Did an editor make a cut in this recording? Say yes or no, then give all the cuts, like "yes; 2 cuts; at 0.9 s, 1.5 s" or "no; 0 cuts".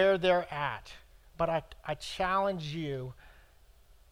no; 0 cuts